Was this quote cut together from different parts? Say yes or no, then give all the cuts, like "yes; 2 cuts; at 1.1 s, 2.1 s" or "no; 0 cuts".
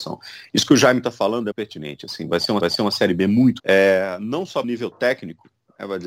yes; 4 cuts; at 1.5 s, 2.6 s, 3.6 s, 4.6 s